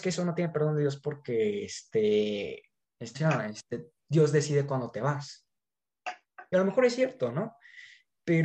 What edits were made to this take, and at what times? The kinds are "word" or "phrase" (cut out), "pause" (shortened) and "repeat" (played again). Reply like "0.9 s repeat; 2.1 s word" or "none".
3.2 s word